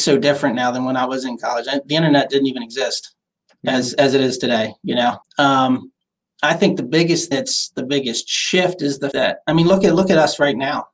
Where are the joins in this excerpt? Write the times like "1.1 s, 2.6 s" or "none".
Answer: 5.2 s, 7.3 s, 9.1 s